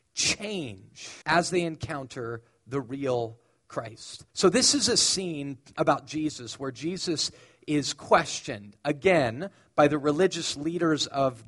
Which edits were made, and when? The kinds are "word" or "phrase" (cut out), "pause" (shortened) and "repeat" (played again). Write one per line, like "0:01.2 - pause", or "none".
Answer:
0:01.2 - pause
0:04.3 - pause